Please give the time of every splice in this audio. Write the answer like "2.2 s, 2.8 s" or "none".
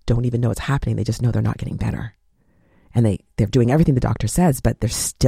none